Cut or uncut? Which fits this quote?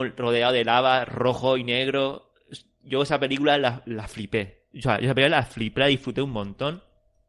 uncut